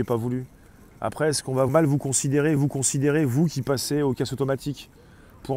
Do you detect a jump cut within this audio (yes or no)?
yes